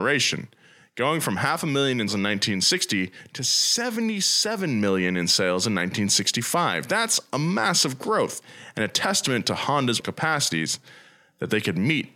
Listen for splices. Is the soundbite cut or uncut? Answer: cut